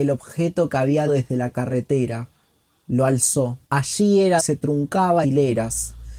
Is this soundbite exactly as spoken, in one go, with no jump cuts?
no; 4 cuts; at 1.1 s, 3.6 s, 4.4 s, 5.2 s

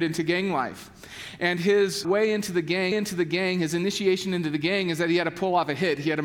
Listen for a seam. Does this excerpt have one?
yes; 2 cuts; at 2.0 s, 2.9 s

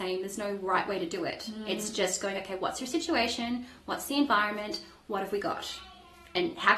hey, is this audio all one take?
yes; 0 cuts

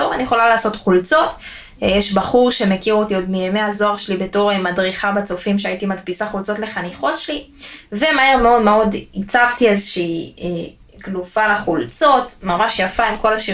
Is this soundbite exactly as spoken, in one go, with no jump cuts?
yes; 0 cuts

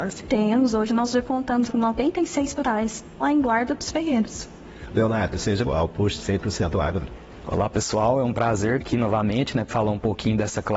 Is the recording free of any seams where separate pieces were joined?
no; 6 cuts; at 1.7 s, 2.6 s, 3.2 s, 5.6 s, 8.8 s, 9.7 s

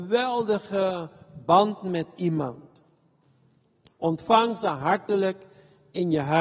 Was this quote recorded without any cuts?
yes; 0 cuts

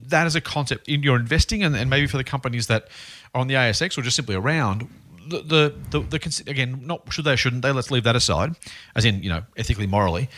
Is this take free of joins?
yes; 0 cuts

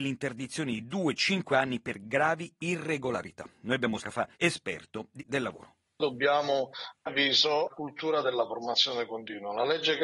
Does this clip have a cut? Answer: yes; 5 cuts; at 4.0 s, 4.3 s, 5.2 s, 7.1 s, 7.7 s

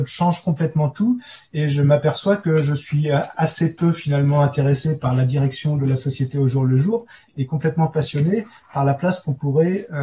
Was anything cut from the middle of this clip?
no; 0 cuts

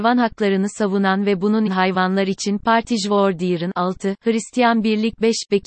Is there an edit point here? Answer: yes; 2 cuts; at 1.7 s, 2.6 s

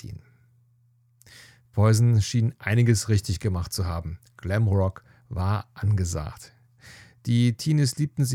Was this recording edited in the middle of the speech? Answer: no; 0 cuts

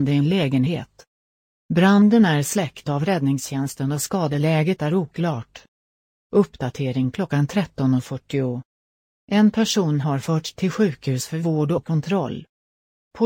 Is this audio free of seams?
yes; 0 cuts

